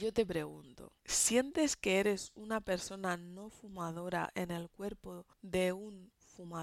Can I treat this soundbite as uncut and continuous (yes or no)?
no